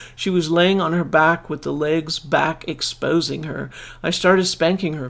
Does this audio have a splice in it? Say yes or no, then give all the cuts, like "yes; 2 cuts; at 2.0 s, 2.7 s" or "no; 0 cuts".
no; 0 cuts